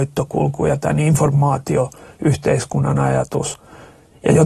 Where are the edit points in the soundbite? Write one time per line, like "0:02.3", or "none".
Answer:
none